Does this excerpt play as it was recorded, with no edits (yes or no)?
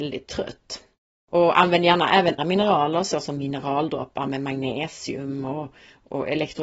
no